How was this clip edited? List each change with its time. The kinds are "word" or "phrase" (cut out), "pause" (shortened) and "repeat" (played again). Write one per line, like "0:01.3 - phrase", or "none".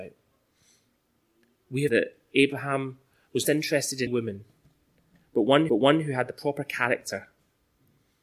0:01.9 - word
0:03.4 - phrase
0:04.1 - word
0:05.7 - repeat